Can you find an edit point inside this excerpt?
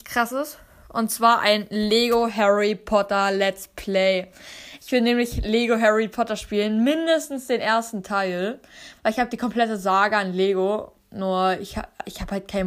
no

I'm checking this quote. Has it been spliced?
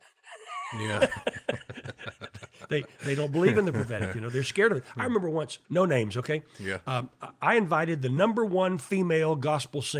yes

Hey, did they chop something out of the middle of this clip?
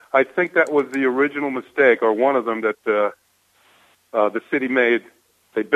no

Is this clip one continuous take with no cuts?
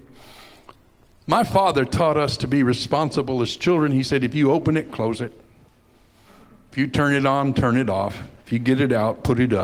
yes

